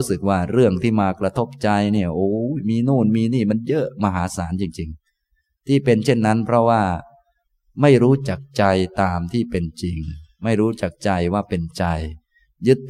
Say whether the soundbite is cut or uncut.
uncut